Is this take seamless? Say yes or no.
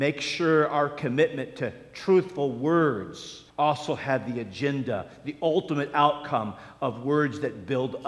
no